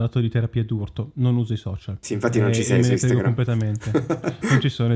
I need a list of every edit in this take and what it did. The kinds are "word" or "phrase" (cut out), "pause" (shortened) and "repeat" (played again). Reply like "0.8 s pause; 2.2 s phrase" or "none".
none